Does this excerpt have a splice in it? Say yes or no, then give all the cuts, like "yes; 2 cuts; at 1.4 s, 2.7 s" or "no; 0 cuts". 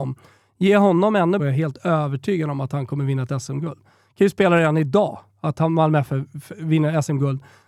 yes; 1 cut; at 1.4 s